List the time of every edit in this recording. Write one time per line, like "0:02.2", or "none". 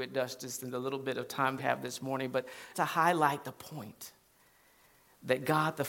0:01.6
0:02.7